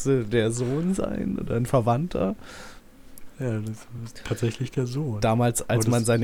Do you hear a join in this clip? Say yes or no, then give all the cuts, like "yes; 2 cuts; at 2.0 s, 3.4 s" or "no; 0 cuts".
no; 0 cuts